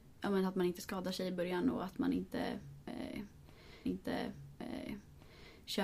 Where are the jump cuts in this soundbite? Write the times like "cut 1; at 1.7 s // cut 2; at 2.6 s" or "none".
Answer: cut 1; at 3.9 s